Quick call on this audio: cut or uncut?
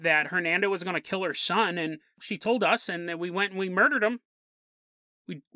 uncut